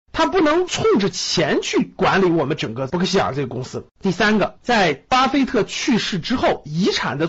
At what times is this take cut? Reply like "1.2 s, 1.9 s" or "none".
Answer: 3.9 s